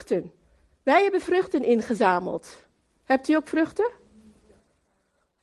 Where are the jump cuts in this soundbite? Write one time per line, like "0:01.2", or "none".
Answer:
none